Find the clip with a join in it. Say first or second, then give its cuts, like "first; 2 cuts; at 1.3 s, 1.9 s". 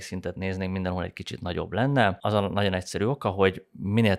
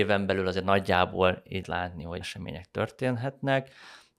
second; 2 cuts; at 1.6 s, 2.2 s